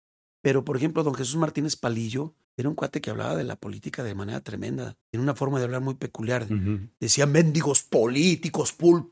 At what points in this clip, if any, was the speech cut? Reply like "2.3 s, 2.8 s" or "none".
2.4 s, 5.0 s, 7.0 s